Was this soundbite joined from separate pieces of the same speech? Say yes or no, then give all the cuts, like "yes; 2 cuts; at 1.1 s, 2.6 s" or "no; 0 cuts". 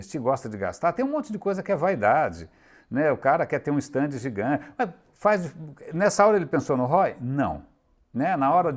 no; 0 cuts